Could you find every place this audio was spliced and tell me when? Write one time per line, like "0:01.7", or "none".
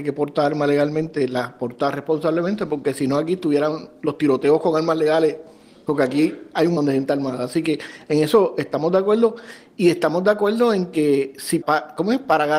0:06.8
0:11.6